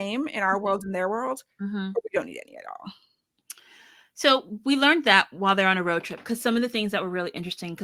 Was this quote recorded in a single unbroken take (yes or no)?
yes